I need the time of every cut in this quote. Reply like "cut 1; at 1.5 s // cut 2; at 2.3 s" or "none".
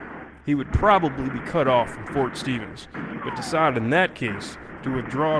none